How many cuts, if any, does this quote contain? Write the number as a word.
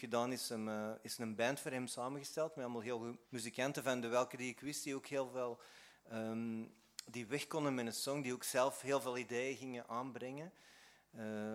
one